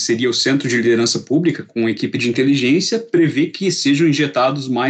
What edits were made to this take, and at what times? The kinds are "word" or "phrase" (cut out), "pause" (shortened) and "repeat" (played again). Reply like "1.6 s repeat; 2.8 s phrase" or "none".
none